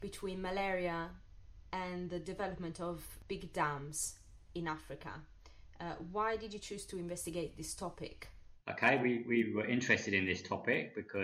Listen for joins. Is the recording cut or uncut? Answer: uncut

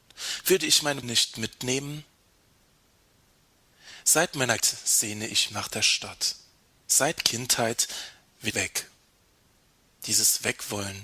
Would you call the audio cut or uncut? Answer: cut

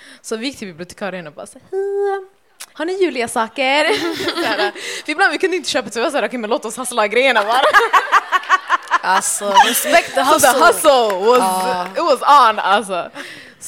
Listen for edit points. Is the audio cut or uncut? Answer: cut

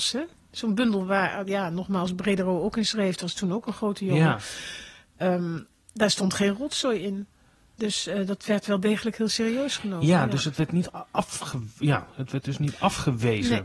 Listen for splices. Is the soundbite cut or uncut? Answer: uncut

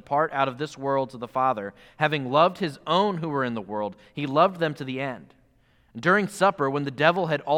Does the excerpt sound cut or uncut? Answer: uncut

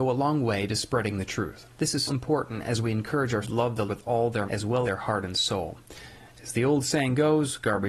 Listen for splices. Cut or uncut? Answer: cut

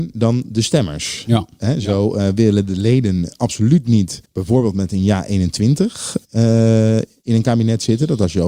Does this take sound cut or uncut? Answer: cut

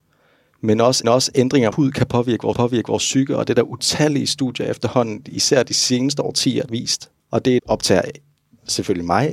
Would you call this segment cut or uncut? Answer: cut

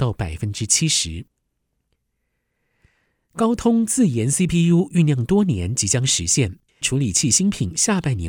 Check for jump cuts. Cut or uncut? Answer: cut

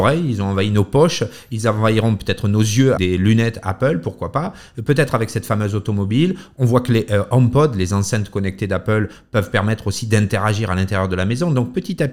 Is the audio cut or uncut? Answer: cut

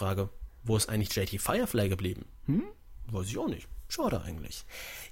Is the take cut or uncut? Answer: uncut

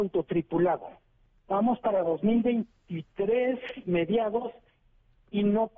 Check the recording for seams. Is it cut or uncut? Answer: uncut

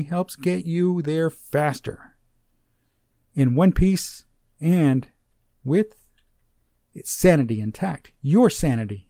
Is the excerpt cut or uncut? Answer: uncut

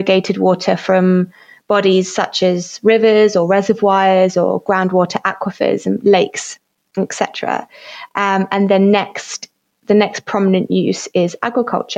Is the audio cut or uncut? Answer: uncut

